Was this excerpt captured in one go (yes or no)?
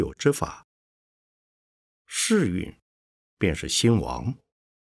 yes